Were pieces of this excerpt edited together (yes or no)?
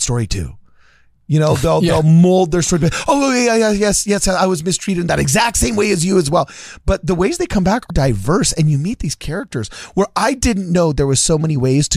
yes